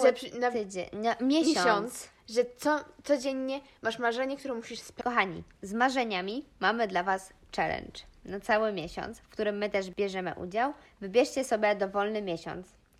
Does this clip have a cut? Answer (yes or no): yes